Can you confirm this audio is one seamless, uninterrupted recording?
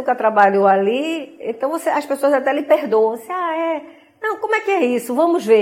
yes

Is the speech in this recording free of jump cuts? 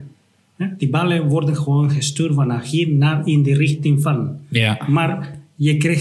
yes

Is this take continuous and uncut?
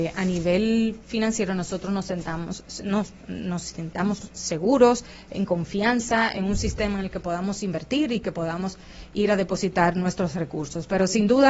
yes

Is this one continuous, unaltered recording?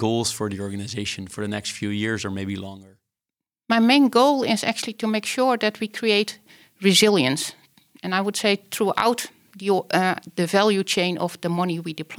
yes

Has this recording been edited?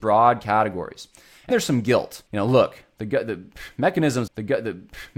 yes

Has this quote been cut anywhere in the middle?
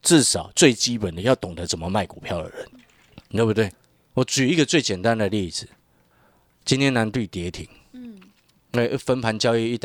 no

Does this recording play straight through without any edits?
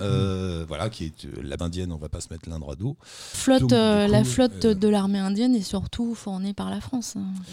no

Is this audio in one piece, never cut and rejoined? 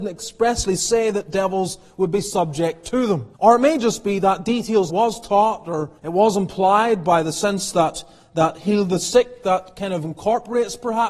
no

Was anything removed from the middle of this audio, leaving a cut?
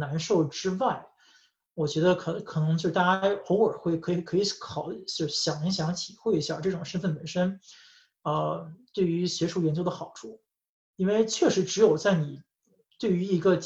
no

